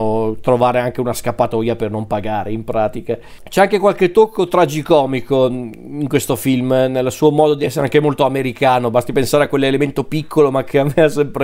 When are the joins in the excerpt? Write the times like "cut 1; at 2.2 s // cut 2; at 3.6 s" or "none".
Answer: none